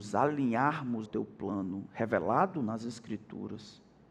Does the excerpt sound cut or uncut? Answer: cut